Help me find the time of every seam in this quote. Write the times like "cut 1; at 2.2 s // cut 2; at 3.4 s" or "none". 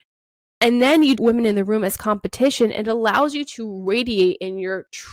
cut 1; at 1.1 s